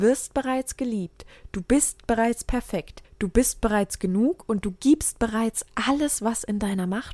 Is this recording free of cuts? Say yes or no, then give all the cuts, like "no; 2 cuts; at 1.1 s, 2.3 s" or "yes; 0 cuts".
no; 1 cut; at 3.0 s